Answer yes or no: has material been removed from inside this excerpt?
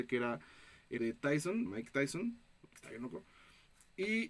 yes